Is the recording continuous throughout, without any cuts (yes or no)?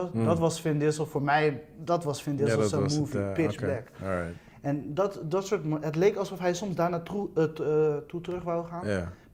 yes